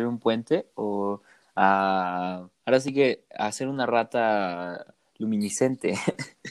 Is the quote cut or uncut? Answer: uncut